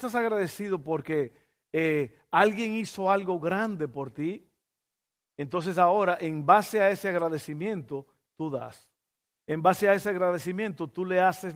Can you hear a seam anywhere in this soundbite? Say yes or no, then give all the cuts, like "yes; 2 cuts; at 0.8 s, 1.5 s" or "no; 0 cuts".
no; 0 cuts